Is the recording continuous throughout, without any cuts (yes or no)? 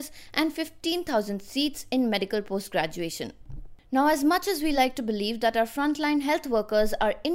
yes